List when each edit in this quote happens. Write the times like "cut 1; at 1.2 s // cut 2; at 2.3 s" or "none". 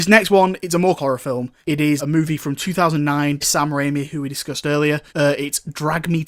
cut 1; at 1.0 s // cut 2; at 1.6 s // cut 3; at 2.0 s // cut 4; at 3.4 s // cut 5; at 5.1 s